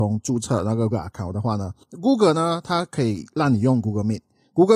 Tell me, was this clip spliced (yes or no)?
yes